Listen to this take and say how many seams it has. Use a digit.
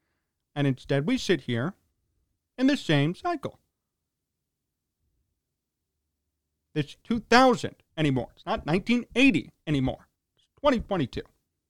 2